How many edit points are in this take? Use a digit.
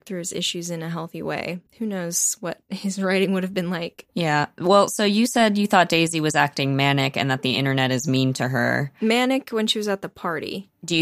1